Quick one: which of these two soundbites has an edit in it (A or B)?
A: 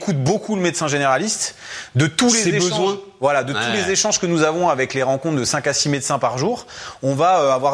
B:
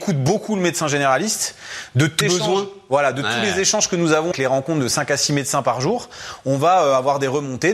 B